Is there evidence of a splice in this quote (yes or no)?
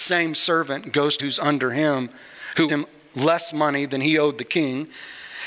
yes